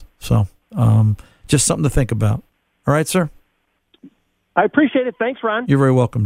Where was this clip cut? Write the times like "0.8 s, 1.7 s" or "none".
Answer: none